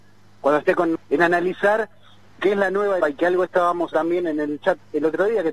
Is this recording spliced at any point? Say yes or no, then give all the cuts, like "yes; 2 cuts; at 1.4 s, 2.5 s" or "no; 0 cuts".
yes; 4 cuts; at 1.0 s, 2.4 s, 3.0 s, 3.9 s